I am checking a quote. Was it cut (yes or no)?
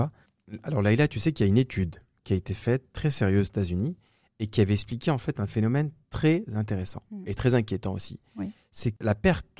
no